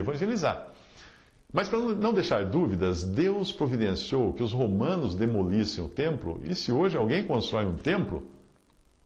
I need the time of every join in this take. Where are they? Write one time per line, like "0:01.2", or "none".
none